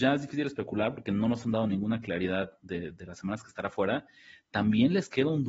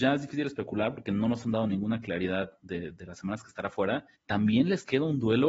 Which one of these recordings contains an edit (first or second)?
second